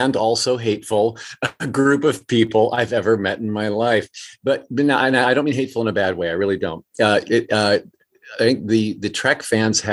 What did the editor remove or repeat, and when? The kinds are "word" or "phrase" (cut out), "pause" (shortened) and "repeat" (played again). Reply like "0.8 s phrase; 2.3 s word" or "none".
none